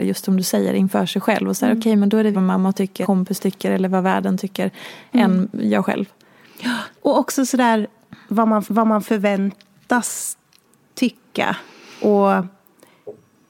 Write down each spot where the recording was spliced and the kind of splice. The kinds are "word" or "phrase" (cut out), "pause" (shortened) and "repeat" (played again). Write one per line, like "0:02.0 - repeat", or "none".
0:02.3 - word
0:03.0 - phrase
0:07.0 - pause
0:08.6 - repeat